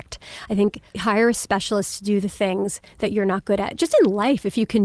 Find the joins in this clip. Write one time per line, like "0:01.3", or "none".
none